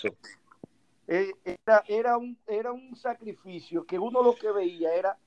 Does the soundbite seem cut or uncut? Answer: uncut